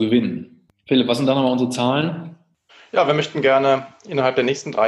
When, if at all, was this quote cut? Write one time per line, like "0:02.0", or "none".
none